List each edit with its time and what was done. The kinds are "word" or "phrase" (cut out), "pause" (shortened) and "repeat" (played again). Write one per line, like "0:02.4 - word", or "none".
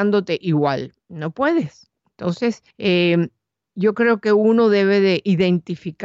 0:01.0 - pause
0:02.7 - pause